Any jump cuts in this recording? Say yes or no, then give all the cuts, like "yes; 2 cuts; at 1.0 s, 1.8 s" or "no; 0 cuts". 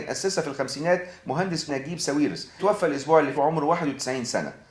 yes; 3 cuts; at 1.7 s, 2.6 s, 3.3 s